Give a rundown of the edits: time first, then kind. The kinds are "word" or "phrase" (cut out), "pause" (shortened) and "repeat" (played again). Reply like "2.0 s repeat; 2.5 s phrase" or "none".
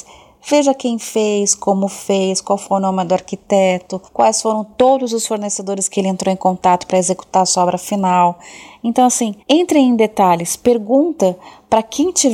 4.1 s pause; 9.4 s pause

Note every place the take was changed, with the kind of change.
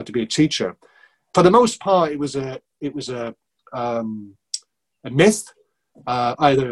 none

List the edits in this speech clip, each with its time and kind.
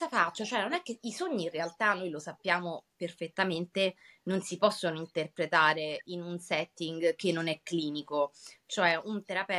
none

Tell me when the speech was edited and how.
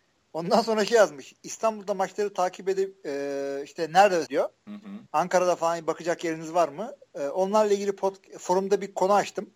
4.3 s word; 5.1 s pause

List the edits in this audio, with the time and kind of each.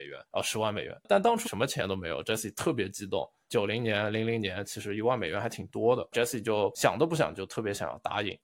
1.4 s word

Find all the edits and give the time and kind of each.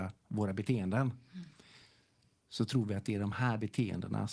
none

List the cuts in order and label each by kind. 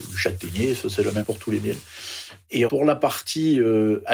1.2 s word; 2.7 s word

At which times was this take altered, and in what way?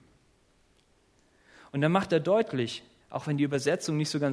3.0 s pause

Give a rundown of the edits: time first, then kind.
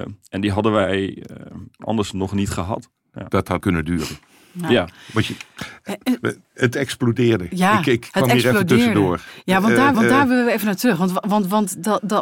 3.6 s word; 9.9 s repeat

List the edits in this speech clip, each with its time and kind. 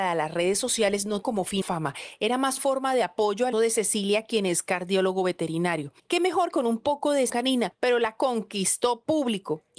1.2 s word; 1.6 s word; 2.6 s word; 3.5 s word; 6.5 s word; 7.3 s word; 8.2 s word

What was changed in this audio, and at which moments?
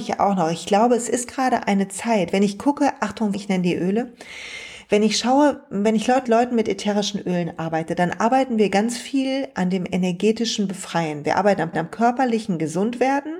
3.3 s word; 6.2 s word; 11.7 s repeat

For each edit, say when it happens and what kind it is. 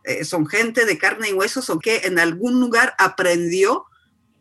1.8 s word

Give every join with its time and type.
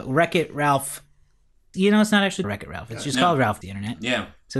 1.7 s word; 2.4 s word; 3.6 s word

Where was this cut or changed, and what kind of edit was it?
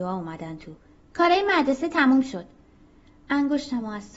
none

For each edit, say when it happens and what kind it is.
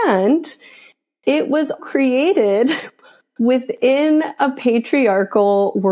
1.8 s word

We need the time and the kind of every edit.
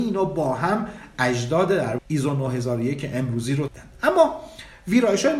2.0 s phrase; 3.7 s word

